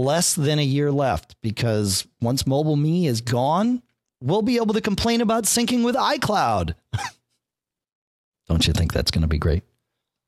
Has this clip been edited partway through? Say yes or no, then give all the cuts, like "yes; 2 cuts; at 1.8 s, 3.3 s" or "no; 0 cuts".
no; 0 cuts